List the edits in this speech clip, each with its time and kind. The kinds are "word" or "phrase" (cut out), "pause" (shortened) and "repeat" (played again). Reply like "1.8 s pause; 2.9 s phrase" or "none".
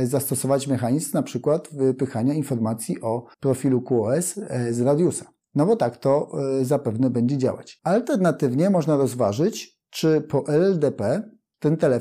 3.3 s pause